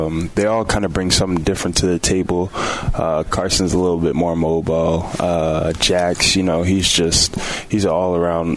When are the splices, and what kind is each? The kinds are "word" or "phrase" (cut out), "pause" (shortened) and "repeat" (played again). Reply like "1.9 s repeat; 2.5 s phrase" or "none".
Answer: none